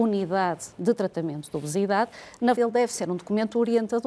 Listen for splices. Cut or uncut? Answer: cut